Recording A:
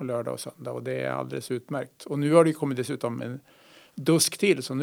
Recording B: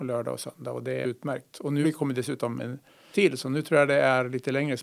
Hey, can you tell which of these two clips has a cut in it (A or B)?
B